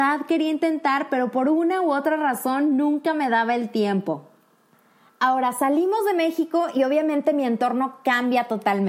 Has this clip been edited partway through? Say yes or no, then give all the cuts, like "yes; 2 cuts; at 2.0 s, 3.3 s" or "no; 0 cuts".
no; 0 cuts